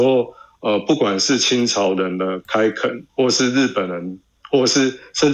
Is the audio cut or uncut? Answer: cut